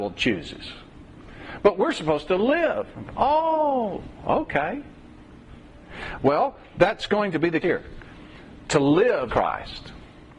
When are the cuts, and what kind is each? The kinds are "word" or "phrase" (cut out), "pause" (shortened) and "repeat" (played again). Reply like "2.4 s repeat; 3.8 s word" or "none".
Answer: 7.6 s word; 9.3 s word